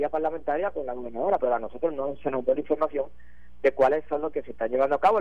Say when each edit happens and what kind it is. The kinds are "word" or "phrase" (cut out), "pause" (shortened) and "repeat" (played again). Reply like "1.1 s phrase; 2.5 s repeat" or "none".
1.4 s word; 2.5 s word; 4.3 s phrase